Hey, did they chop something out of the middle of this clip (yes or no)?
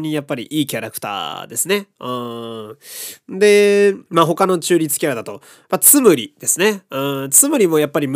yes